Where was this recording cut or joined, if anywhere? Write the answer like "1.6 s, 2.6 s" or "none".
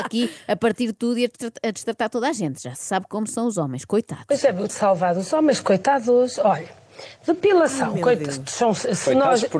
4.7 s